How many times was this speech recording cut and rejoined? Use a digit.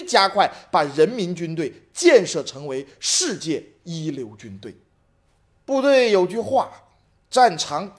0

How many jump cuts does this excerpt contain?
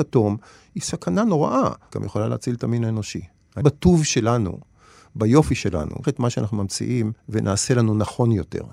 4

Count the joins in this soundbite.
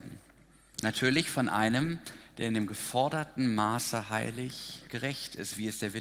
1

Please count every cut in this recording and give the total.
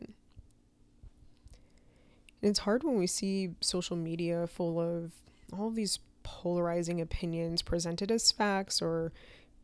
0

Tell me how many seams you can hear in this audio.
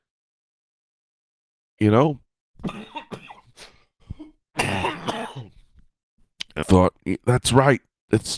2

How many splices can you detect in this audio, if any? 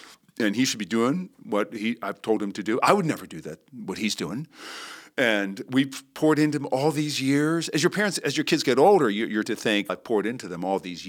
2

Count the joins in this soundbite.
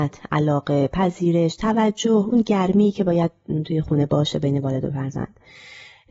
0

